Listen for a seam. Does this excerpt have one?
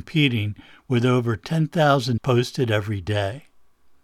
yes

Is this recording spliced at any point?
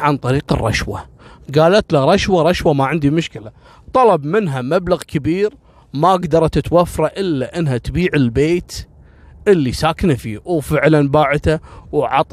no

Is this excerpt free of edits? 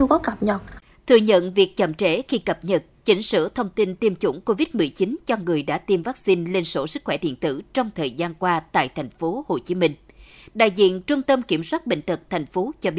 yes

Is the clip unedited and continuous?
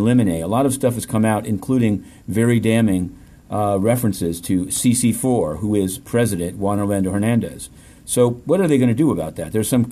yes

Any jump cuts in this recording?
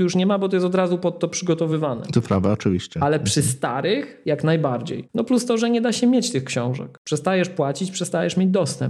no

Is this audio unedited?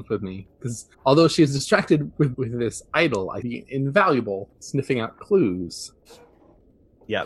no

